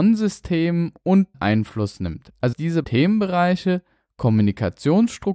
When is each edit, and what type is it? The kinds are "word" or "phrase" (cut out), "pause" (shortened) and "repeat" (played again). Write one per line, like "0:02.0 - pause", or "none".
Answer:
0:01.3 - word
0:02.5 - word
0:02.8 - word